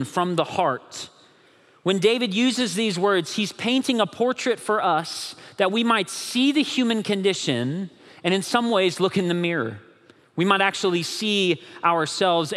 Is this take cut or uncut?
uncut